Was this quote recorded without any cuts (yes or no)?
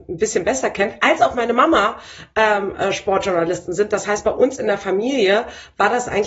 yes